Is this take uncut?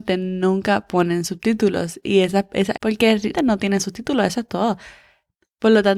no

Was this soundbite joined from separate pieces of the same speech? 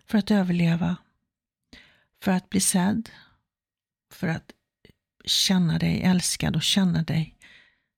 no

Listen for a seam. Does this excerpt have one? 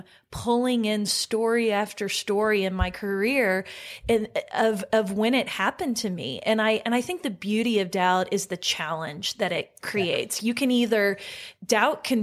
no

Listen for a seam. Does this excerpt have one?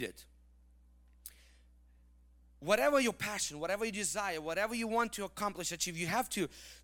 no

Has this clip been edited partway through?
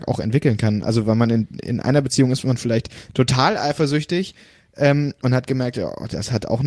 no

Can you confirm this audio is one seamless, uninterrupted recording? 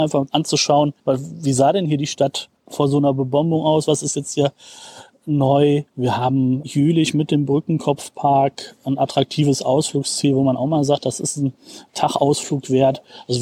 no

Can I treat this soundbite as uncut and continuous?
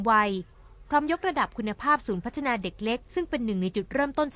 no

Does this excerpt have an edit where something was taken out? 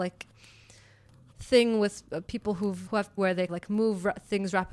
yes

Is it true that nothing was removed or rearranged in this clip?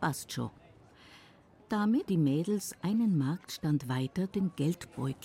no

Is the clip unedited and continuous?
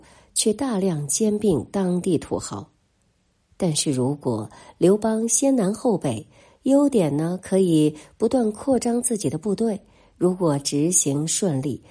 yes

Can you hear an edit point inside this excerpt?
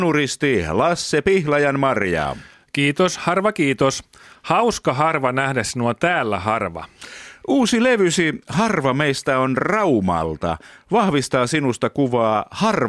no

